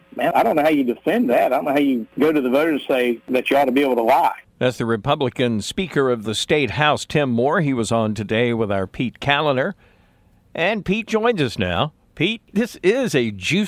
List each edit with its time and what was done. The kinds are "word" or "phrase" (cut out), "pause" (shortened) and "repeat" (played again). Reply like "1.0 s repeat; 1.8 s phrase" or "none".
none